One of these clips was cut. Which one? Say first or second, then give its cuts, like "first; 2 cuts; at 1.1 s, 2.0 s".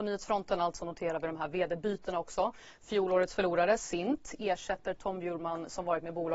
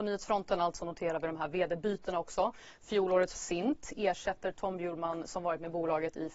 second; 1 cut; at 3.4 s